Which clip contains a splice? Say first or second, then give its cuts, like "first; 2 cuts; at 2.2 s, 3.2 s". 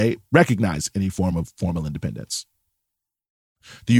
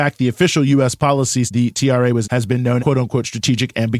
second; 3 cuts; at 1.5 s, 2.2 s, 2.8 s